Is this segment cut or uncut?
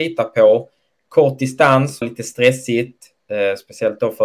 cut